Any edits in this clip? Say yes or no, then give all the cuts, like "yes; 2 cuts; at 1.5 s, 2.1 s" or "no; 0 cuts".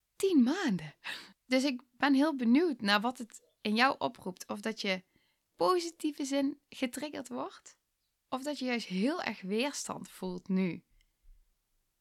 yes; 2 cuts; at 1.3 s, 5.5 s